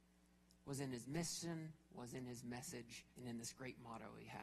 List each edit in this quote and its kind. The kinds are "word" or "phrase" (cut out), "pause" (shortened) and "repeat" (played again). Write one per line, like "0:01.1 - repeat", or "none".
0:03.1 - pause